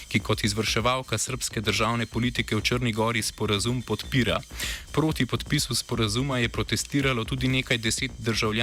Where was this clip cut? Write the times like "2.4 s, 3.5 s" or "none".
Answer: none